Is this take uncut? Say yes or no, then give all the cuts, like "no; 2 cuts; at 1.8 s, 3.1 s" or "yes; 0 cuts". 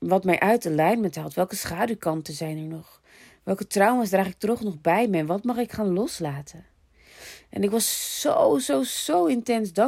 yes; 0 cuts